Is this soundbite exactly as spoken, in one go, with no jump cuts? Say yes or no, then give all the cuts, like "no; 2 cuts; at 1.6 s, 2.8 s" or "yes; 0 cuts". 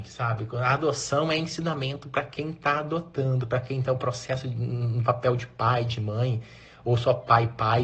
yes; 0 cuts